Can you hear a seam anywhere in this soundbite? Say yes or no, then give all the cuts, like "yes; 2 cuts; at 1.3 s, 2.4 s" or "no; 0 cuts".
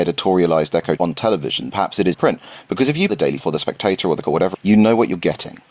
yes; 7 cuts; at 1.0 s, 1.7 s, 2.1 s, 3.1 s, 3.4 s, 4.2 s, 4.5 s